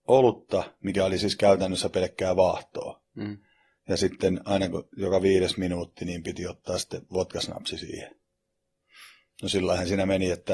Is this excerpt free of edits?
yes; 0 cuts

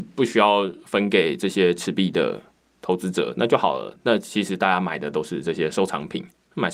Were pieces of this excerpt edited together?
no; 0 cuts

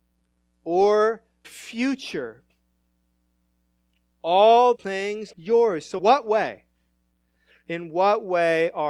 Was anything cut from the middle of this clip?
yes; 4 cuts; at 1.4 s, 4.7 s, 5.3 s, 6.0 s

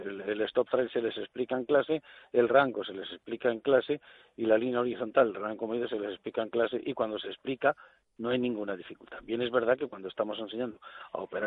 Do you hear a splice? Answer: no; 0 cuts

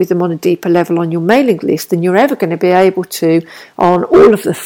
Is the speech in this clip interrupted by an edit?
no; 0 cuts

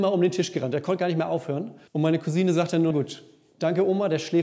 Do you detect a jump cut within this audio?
yes; 2 cuts; at 1.9 s, 2.9 s

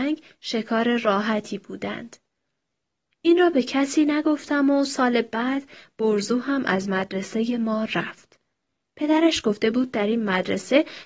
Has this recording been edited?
no; 0 cuts

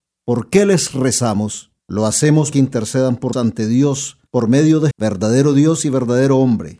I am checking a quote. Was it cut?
yes; 5 cuts; at 1.8 s, 2.5 s, 3.3 s, 4.3 s, 4.9 s

